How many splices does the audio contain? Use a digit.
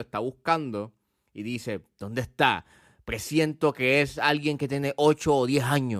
0